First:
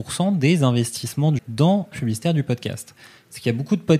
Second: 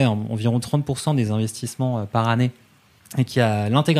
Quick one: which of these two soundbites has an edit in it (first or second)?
first